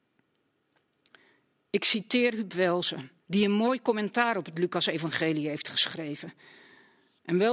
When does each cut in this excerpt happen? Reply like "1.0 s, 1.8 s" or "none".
3.2 s